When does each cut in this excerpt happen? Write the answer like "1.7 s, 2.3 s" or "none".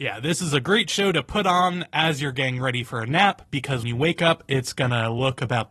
3.8 s